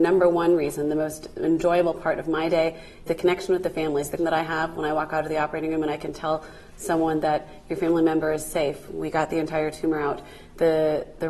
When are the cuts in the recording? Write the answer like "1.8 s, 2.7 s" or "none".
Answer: 3.1 s, 4.2 s